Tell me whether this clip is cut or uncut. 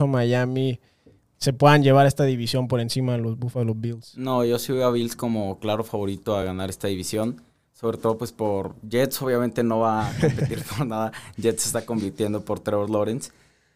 uncut